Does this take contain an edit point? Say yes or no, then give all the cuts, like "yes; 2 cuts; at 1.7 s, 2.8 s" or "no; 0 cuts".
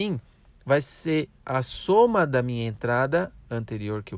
no; 0 cuts